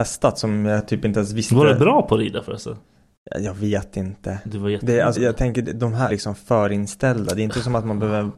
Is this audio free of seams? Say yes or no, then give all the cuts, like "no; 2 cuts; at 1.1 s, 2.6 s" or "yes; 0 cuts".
no; 2 cuts; at 5.1 s, 6.1 s